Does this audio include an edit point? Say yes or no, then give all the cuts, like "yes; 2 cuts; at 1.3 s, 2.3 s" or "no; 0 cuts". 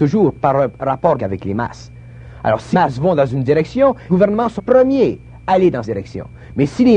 yes; 6 cuts; at 1.2 s, 2.7 s, 4.1 s, 4.6 s, 5.4 s, 5.8 s